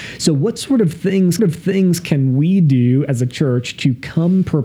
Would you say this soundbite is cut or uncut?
cut